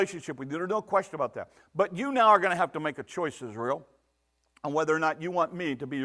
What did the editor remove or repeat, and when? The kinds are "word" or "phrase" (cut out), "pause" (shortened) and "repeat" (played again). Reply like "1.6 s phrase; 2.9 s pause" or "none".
none